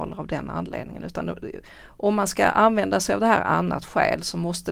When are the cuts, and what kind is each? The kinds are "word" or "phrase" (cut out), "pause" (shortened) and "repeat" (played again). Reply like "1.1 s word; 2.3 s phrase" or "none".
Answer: none

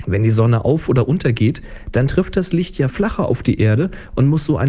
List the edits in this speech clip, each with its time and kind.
2.9 s word

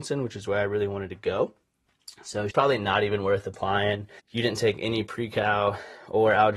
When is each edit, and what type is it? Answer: 2.5 s phrase; 4.2 s pause

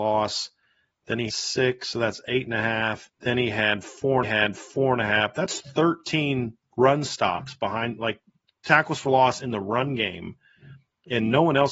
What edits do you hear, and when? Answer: 1.3 s word; 3.1 s pause; 4.2 s repeat

